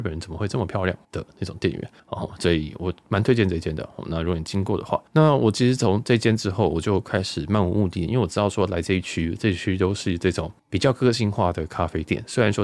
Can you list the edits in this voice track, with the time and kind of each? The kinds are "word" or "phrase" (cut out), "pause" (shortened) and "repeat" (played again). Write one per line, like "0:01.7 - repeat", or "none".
0:01.0 - pause
0:02.0 - pause
0:05.1 - pause
0:10.6 - pause